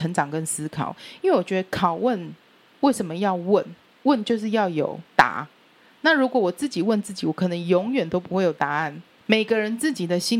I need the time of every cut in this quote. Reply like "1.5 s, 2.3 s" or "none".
5.1 s